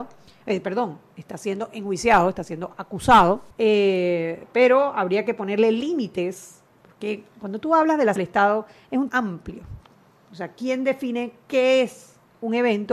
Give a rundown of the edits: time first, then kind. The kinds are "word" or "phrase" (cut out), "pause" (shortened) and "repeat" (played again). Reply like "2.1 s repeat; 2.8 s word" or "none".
3.5 s pause; 6.7 s pause; 8.2 s phrase; 9.1 s phrase